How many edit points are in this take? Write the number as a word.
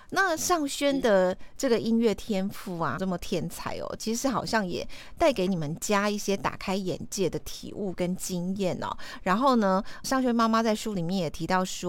two